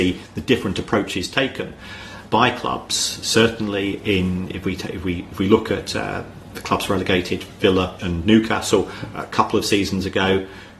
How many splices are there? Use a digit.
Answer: 2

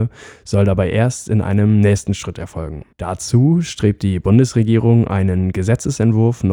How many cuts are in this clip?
1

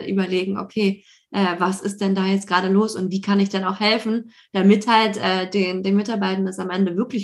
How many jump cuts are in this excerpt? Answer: 0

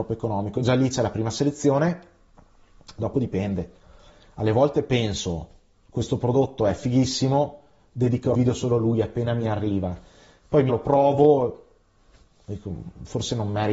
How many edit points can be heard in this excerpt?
2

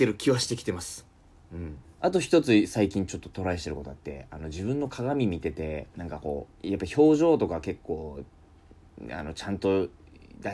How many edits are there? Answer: 3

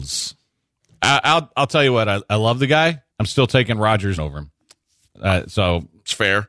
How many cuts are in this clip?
2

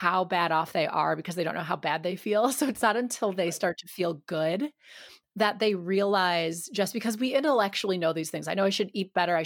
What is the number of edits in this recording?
0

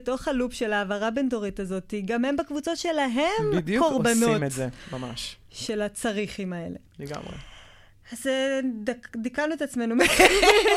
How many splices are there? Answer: 0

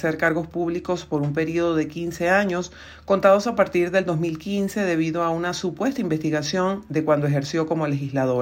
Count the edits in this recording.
0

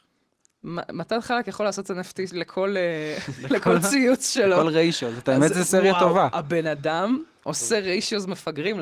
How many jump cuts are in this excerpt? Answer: 0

